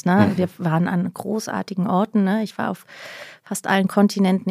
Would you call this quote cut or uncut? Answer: uncut